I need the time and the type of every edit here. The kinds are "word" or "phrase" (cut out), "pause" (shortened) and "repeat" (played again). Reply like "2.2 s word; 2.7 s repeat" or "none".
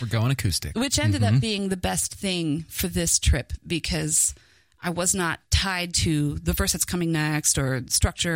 5.4 s pause